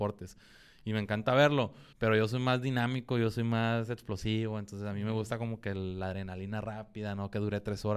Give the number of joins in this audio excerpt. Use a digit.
1